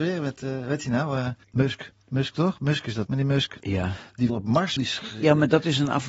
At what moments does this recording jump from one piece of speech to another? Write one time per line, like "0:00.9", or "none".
0:03.1
0:04.3
0:04.8